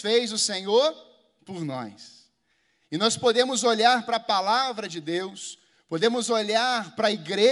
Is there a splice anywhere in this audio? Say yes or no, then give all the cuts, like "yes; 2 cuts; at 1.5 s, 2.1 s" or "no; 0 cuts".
no; 0 cuts